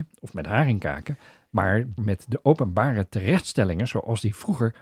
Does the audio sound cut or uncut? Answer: cut